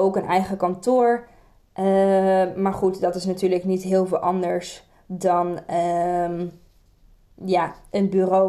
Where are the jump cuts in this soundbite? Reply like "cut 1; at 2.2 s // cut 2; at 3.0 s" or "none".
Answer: none